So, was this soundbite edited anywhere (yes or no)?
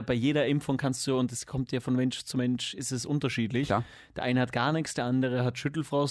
no